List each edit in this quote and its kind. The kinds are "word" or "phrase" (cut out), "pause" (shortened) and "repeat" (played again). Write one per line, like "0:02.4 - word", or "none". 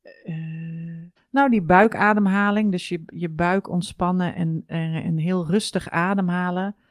0:01.2 - pause
0:04.3 - word